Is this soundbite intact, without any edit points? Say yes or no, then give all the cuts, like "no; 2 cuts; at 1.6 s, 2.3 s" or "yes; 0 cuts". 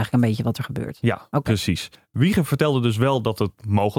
yes; 0 cuts